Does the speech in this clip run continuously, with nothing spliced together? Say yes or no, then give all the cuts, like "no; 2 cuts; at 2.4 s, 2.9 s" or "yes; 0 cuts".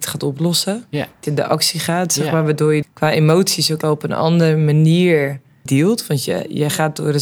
no; 4 cuts; at 1.3 s, 2.8 s, 3.8 s, 5.7 s